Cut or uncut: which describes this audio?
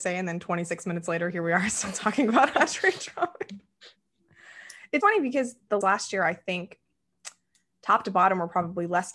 cut